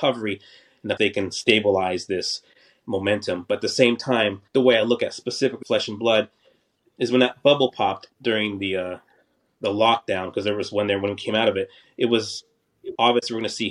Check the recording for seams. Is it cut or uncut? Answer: cut